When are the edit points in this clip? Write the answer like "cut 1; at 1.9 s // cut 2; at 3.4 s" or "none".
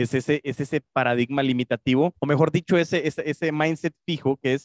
cut 1; at 2.2 s